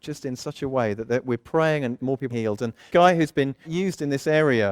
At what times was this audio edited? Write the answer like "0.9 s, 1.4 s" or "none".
2.0 s, 2.3 s, 2.9 s, 3.6 s